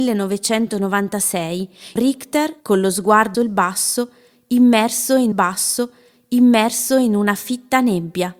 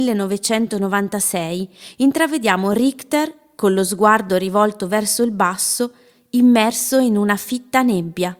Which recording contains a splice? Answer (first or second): first